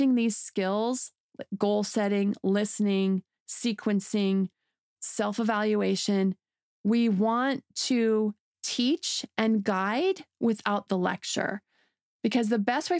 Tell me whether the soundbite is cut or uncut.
uncut